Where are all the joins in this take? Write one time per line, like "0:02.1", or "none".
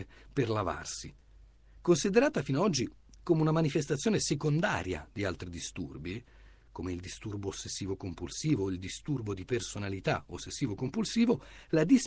none